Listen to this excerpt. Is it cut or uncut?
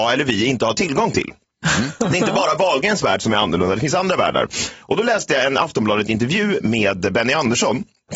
uncut